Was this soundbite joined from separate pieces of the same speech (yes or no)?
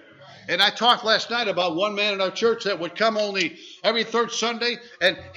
no